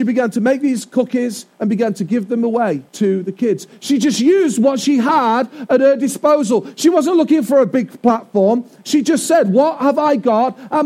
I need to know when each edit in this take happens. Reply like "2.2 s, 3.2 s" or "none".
1.5 s, 2.9 s